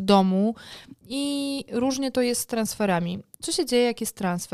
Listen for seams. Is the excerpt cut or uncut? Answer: uncut